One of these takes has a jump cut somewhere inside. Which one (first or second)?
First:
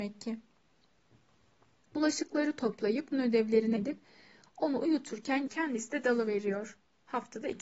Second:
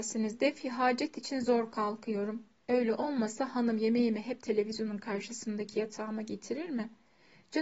first